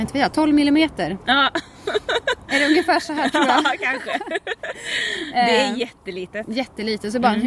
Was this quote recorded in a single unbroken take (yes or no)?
yes